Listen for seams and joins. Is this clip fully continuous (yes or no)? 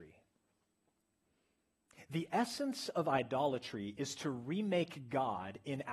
yes